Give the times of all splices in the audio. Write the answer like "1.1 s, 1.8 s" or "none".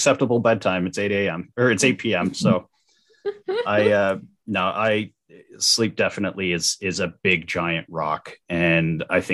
none